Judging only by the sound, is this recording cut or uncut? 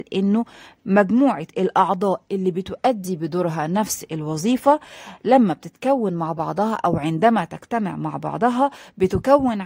uncut